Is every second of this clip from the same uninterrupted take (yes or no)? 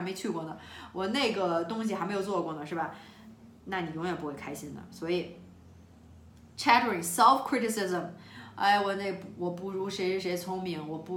yes